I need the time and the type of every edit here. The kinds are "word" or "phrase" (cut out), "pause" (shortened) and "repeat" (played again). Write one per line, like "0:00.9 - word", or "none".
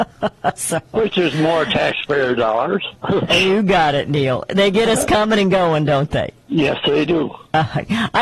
0:06.4 - pause

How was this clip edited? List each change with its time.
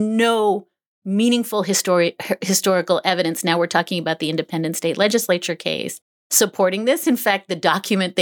none

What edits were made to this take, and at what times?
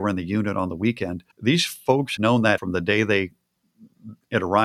0:01.3 - pause
0:02.2 - word
0:02.6 - word

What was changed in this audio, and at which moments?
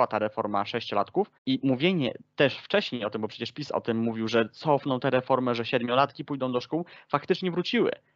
0:01.4 - pause

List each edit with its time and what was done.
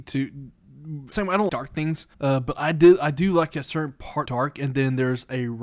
0:01.1 - phrase
0:01.5 - word
0:02.1 - pause
0:04.3 - word

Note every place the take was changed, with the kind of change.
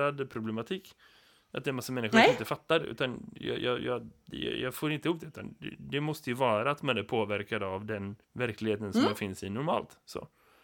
0:08.2 - pause

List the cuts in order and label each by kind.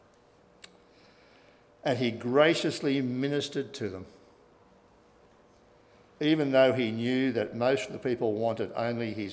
none

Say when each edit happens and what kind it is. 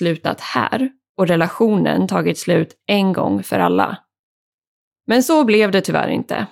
none

